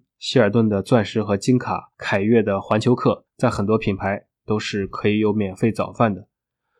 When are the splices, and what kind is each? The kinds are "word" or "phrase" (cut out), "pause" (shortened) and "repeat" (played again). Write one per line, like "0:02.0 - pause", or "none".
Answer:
0:01.9 - pause
0:03.3 - pause